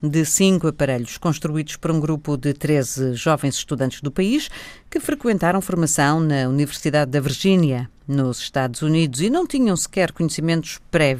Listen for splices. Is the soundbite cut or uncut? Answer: uncut